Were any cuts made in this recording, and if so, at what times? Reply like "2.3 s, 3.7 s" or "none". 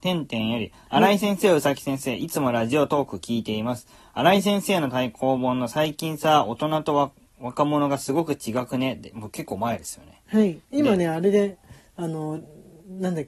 10.6 s